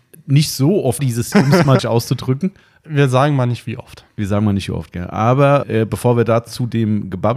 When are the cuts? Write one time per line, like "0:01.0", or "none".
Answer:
0:01.0
0:01.3
0:01.8
0:02.6
0:05.6

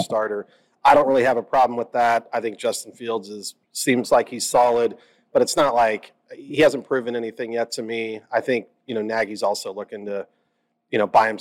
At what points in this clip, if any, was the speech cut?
0:03.6

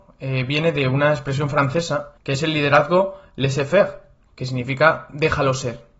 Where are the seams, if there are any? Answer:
0:02.2

